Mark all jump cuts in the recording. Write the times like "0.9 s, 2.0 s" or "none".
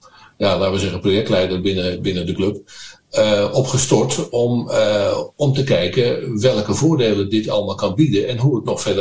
none